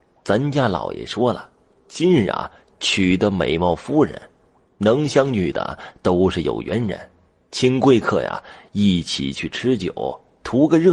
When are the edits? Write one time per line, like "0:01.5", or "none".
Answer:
none